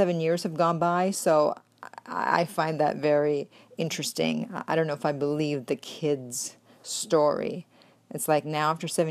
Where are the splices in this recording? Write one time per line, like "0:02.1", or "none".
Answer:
none